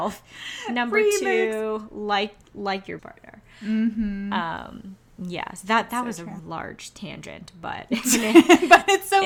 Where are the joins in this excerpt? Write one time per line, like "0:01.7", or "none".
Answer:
0:03.0
0:06.4